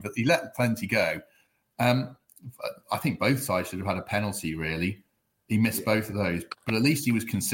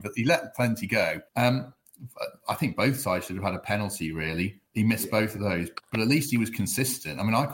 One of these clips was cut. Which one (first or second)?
second